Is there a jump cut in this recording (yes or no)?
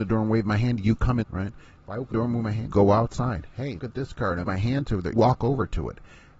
yes